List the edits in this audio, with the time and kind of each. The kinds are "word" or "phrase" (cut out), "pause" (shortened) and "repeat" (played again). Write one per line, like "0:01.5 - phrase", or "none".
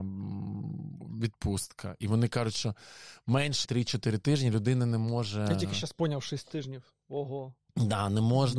0:03.6 - phrase